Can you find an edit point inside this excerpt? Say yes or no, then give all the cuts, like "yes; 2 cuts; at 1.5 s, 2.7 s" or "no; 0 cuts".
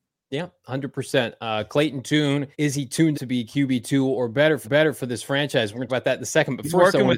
yes; 4 cuts; at 2.5 s, 3.1 s, 4.6 s, 5.9 s